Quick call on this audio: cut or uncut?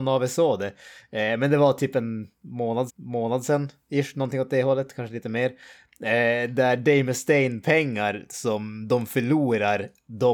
cut